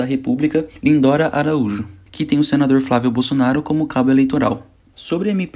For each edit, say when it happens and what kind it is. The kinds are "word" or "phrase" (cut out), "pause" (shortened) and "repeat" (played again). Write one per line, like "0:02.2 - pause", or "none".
0:02.3 - word